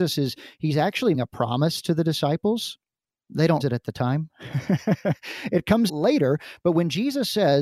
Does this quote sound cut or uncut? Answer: cut